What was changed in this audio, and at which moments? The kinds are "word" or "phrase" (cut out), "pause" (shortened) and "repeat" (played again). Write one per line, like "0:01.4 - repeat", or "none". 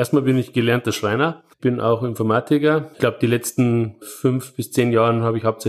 0:01.5 - pause
0:02.9 - word